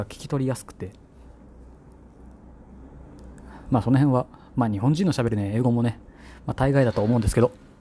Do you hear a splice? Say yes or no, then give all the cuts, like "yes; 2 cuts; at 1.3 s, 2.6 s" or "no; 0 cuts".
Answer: no; 0 cuts